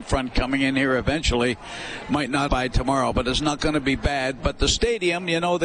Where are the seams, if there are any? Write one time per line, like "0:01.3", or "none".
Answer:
0:02.5